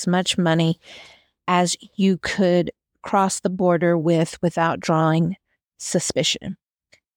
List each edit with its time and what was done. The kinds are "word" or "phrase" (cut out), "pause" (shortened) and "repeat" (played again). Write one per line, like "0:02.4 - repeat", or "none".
none